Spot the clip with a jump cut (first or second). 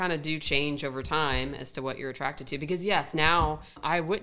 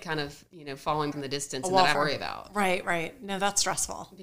second